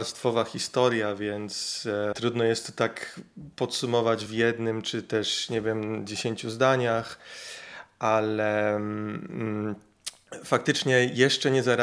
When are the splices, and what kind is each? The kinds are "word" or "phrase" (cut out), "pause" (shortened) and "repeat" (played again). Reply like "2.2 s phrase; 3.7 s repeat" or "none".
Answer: 2.1 s word; 4.3 s word